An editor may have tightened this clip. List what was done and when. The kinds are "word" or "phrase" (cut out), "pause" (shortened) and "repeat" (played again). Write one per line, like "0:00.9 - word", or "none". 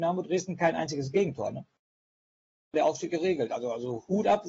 0:02.7 - phrase
0:03.1 - word